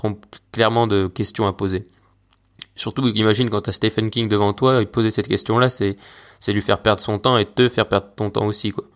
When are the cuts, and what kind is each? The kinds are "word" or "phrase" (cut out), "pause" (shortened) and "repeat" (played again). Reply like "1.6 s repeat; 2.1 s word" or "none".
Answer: none